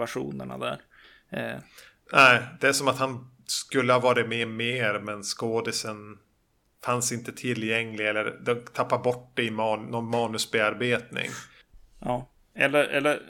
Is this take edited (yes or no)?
no